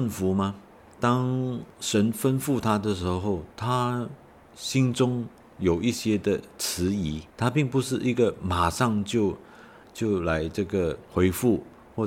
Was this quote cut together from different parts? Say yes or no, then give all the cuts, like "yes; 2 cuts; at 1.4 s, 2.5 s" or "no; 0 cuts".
yes; 2 cuts; at 3.5 s, 7.3 s